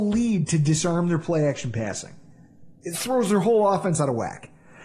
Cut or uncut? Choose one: uncut